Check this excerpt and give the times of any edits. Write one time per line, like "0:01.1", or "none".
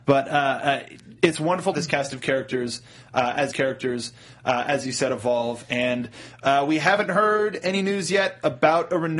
0:01.2
0:01.7
0:03.5